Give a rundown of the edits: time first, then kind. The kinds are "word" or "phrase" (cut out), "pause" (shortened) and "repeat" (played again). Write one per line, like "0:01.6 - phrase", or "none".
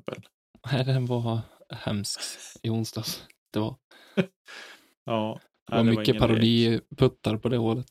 0:03.5 - phrase